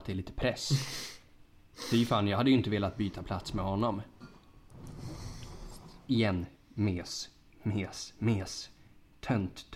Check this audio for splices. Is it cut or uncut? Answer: uncut